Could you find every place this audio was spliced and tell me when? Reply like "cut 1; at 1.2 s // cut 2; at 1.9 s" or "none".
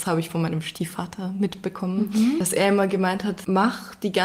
none